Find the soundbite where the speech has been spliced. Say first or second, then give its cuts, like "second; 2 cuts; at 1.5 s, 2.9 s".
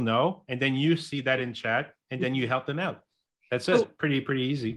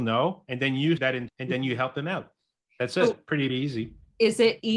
second; 3 cuts; at 1.0 s, 1.3 s, 3.5 s